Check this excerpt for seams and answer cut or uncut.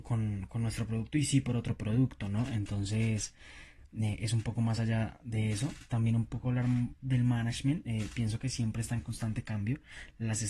uncut